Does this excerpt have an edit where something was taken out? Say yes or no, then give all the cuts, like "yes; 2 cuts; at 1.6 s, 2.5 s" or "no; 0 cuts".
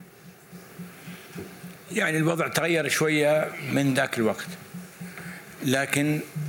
no; 0 cuts